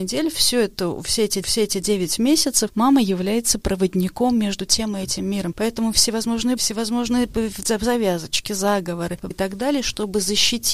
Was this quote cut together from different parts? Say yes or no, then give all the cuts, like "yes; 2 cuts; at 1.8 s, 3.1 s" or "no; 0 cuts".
yes; 3 cuts; at 1.4 s, 6.6 s, 9.3 s